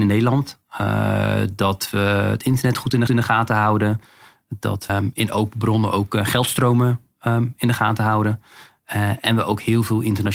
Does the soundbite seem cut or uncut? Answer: cut